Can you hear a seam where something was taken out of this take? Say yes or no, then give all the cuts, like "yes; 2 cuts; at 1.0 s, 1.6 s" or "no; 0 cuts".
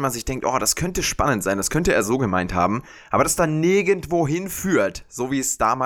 no; 0 cuts